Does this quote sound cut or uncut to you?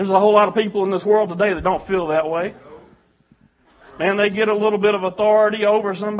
uncut